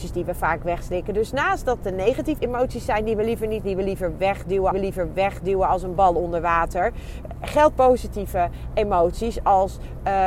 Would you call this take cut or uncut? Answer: cut